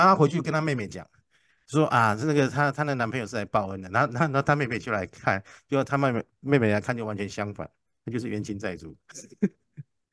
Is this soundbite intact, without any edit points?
yes; 0 cuts

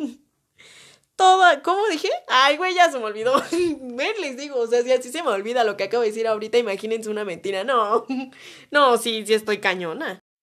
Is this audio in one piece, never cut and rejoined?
yes; 0 cuts

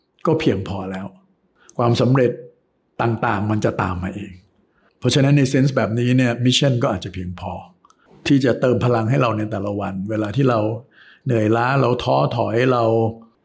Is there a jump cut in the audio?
no; 0 cuts

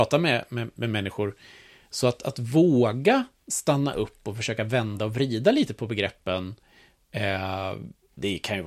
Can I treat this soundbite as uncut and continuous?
yes; 0 cuts

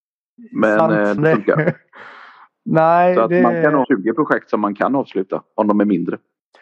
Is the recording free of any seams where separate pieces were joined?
no; 2 cuts; at 1.2 s, 3.8 s

